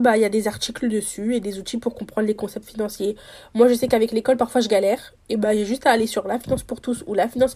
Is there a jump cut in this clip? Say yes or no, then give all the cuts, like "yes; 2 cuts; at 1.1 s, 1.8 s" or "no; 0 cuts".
no; 0 cuts